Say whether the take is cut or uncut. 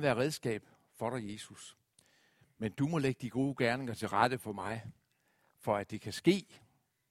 uncut